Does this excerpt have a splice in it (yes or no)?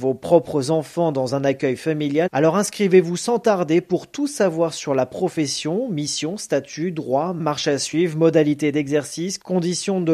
no